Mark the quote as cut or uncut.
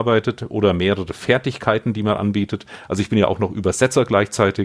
uncut